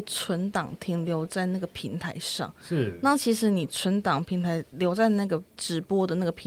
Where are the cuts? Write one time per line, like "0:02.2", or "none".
0:05.5